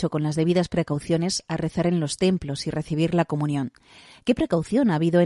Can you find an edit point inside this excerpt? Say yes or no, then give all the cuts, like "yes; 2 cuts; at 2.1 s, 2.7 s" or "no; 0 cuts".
no; 0 cuts